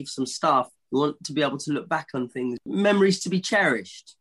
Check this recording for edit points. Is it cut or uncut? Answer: uncut